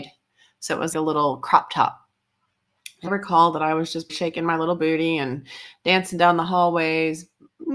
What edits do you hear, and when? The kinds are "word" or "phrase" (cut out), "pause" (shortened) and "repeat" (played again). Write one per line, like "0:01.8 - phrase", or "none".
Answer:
0:00.9 - word
0:03.1 - word
0:04.1 - word